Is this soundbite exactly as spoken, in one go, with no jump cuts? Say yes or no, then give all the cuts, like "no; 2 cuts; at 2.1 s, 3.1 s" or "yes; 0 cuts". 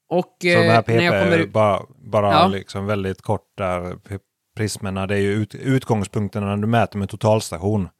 no; 1 cut; at 1.9 s